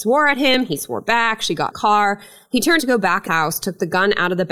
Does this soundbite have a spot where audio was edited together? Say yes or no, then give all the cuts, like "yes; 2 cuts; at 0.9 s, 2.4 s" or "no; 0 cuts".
yes; 3 cuts; at 1.7 s, 2.8 s, 3.3 s